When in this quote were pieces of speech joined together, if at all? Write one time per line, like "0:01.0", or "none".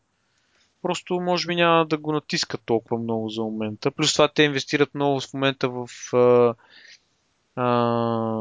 none